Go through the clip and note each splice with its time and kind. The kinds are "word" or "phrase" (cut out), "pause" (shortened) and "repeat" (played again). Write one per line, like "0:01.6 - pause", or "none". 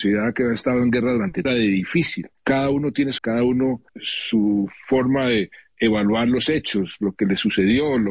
0:01.4 - phrase
0:03.2 - word
0:03.9 - word